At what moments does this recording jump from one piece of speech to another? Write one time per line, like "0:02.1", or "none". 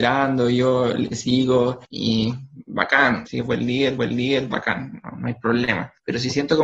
0:01.8
0:03.3
0:04.0